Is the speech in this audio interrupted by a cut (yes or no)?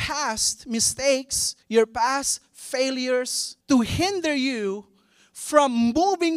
yes